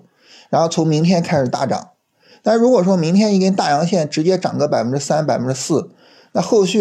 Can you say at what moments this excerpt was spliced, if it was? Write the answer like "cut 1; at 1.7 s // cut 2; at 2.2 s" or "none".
none